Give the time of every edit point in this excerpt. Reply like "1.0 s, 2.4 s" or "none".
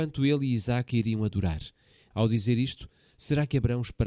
none